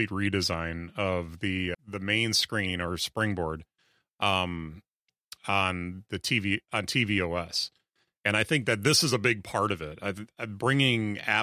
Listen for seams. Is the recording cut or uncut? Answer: cut